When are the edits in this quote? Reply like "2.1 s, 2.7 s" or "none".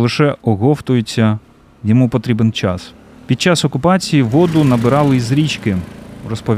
none